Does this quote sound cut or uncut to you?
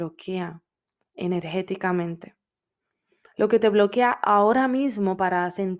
uncut